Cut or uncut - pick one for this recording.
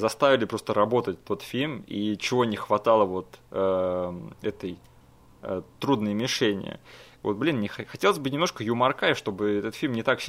uncut